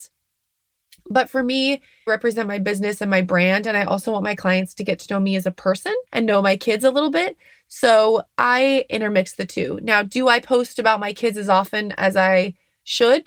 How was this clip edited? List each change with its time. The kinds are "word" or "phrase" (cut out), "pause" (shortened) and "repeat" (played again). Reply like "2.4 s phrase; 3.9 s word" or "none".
2.1 s phrase; 6.1 s pause